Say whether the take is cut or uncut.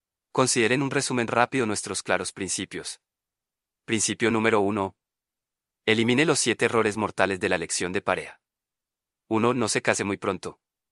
uncut